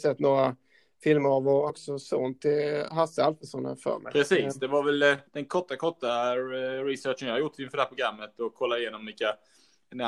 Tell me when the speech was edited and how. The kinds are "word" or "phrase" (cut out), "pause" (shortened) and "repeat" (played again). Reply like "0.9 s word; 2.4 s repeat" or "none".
1.7 s phrase; 5.3 s pause